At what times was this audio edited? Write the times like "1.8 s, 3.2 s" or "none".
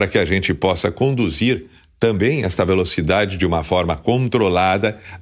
none